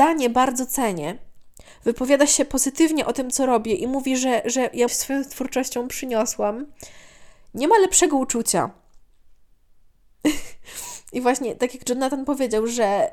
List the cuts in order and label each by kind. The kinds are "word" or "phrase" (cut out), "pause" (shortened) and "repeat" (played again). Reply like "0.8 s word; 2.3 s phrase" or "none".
4.9 s phrase